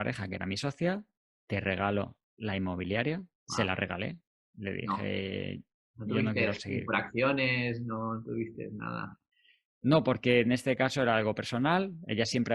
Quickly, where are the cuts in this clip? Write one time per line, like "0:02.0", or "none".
none